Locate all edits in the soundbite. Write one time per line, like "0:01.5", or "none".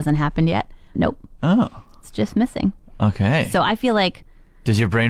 0:00.9